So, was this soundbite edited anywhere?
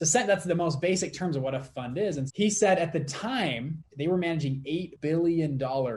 yes; 2 cuts; at 2.3 s, 3.9 s

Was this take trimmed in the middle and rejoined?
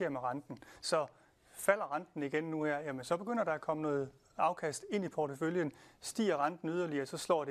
no; 0 cuts

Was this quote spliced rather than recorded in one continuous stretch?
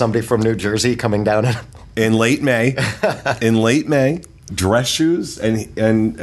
yes; 1 cut; at 4.5 s

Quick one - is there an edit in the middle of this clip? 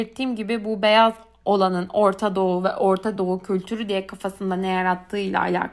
no; 0 cuts

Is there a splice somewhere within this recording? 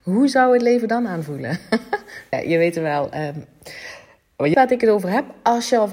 yes; 2 cuts; at 2.3 s, 4.5 s

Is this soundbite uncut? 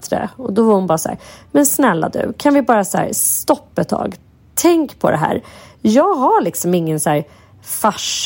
yes; 0 cuts

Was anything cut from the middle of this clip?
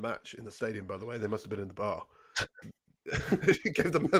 yes; 1 cut; at 2.6 s

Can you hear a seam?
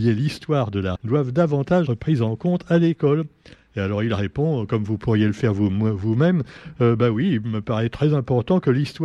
yes; 2 cuts; at 1.0 s, 1.9 s

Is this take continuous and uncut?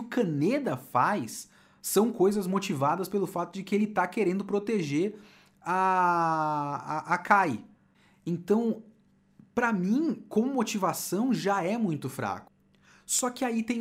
yes; 0 cuts

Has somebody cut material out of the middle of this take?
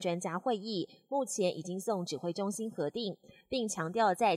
no; 0 cuts

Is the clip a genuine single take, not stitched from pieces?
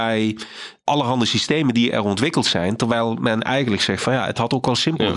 yes; 0 cuts

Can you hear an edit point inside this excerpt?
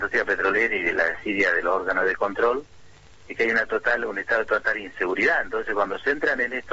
no; 0 cuts

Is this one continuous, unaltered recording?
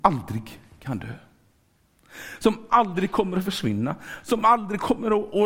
yes; 0 cuts

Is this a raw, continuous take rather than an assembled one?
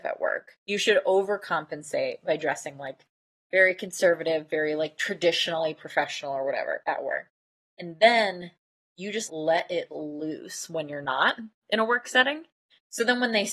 no; 1 cut; at 9.3 s

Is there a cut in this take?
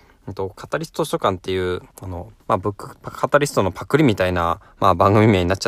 yes; 2 cuts; at 1.9 s, 2.4 s

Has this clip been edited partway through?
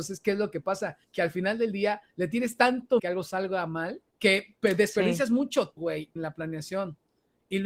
yes; 6 cuts; at 1.0 s, 2.1 s, 3.0 s, 4.1 s, 5.8 s, 6.2 s

